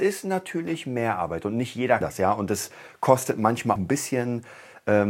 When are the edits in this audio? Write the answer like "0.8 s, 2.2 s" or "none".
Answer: 2.0 s, 3.8 s